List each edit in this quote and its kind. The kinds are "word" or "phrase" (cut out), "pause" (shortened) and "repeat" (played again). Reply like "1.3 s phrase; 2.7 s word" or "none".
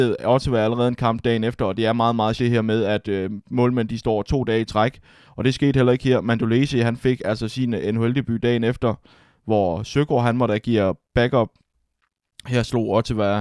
2.4 s word